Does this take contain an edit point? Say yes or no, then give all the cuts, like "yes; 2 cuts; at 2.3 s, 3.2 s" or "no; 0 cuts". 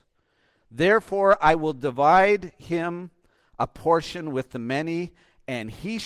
no; 0 cuts